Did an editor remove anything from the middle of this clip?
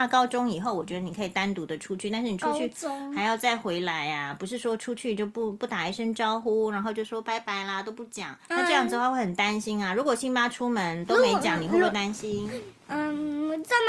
yes; 1 cut; at 8.4 s

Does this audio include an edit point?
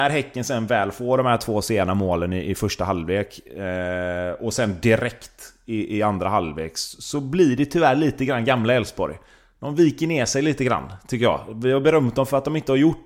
no; 0 cuts

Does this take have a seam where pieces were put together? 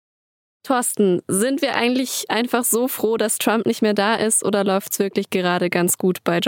no; 0 cuts

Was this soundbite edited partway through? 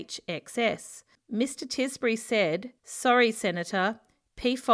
yes; 2 cuts; at 1.1 s, 2.8 s

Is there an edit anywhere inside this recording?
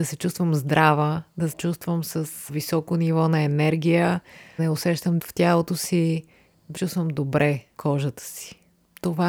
yes; 6 cuts; at 1.5 s, 2.5 s, 4.6 s, 5.2 s, 6.8 s, 7.7 s

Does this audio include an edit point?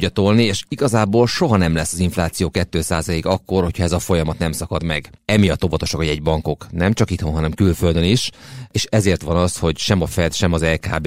no; 0 cuts

